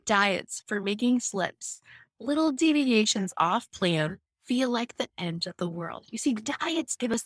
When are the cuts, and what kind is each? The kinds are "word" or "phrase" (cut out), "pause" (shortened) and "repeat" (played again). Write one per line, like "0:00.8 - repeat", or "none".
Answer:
0:04.3 - pause